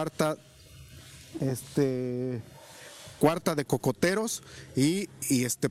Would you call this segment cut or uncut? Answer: uncut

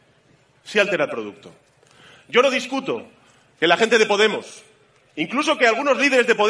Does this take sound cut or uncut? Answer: uncut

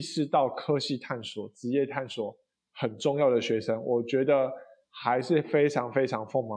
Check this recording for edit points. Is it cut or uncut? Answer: uncut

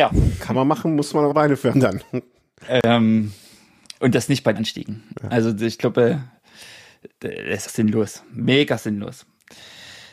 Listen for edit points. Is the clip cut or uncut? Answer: cut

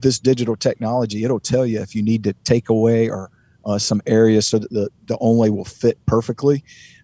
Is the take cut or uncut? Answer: uncut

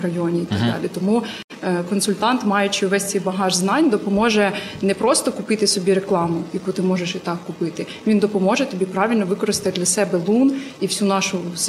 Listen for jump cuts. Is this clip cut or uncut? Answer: uncut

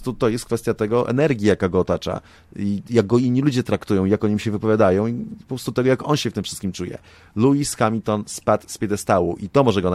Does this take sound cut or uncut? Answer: uncut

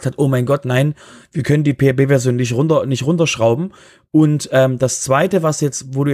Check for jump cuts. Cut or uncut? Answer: uncut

